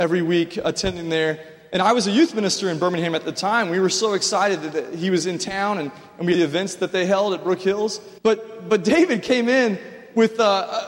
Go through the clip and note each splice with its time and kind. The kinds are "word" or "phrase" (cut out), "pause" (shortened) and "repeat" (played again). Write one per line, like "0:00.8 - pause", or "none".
0:06.3 - phrase
0:08.2 - pause